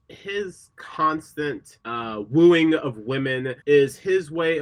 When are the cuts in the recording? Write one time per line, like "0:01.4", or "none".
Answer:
0:01.8
0:03.6